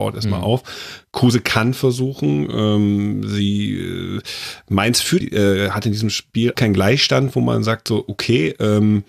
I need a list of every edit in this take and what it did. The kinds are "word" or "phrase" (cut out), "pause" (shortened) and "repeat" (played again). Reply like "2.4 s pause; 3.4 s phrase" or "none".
5.2 s word; 6.5 s phrase